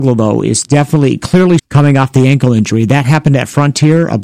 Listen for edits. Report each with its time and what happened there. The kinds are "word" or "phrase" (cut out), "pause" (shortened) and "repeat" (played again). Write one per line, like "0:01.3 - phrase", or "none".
0:01.6 - word